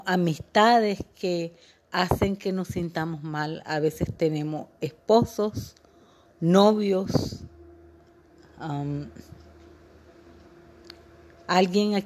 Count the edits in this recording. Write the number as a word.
zero